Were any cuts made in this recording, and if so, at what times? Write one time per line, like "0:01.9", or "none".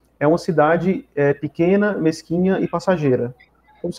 none

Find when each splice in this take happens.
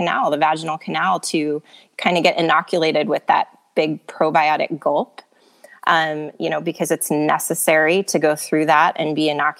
none

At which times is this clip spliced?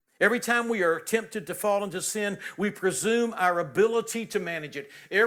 none

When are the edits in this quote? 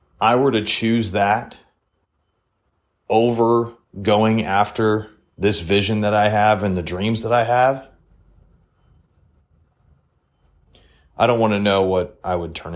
none

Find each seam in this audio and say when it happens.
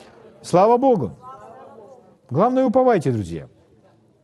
none

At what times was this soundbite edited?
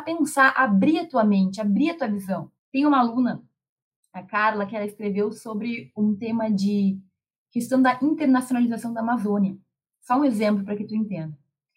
0:02.6

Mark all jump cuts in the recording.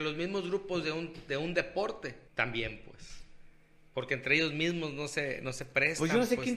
0:02.3

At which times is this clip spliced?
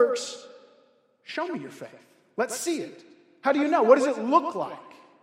none

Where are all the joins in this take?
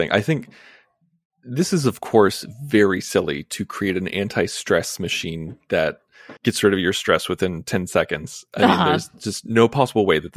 0:06.4

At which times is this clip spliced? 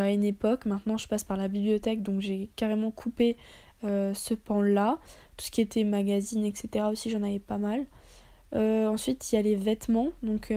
none

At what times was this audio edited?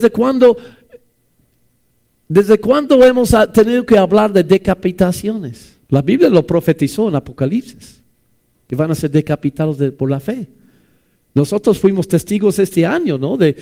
0:05.8

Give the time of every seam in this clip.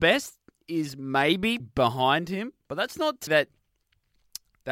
0:01.6
0:03.3

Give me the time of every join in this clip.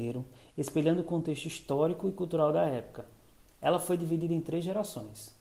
none

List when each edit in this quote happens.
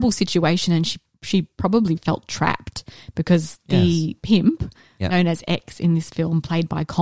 0:02.0

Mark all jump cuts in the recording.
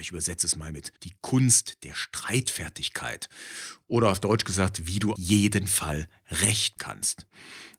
0:01.0
0:05.2
0:06.8

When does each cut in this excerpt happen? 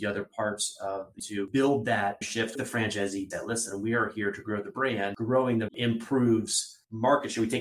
0:01.2
0:02.2
0:02.6
0:03.3
0:05.7

